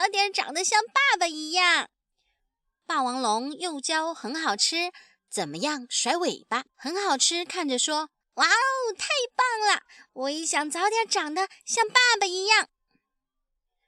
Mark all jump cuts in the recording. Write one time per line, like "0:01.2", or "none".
0:06.7
0:08.2